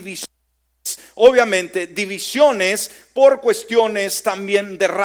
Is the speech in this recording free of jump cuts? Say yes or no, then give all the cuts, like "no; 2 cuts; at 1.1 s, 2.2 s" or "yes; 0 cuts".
yes; 0 cuts